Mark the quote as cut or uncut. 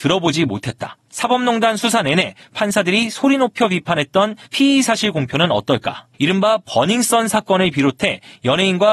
cut